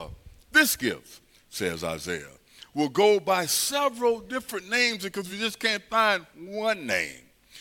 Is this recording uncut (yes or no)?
yes